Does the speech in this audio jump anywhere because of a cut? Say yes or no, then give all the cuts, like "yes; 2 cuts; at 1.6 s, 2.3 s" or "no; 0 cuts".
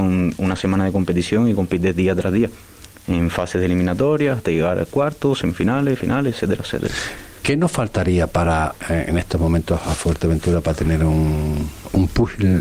no; 0 cuts